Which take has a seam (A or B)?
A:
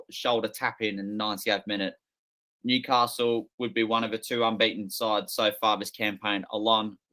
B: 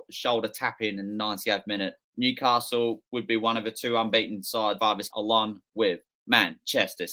B